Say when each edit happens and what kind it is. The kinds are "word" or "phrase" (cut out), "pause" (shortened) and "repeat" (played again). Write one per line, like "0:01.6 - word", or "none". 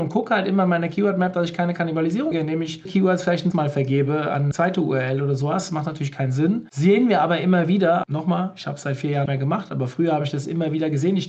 0:02.3 - word
0:02.9 - word
0:03.5 - word
0:04.5 - word
0:08.0 - word
0:09.3 - word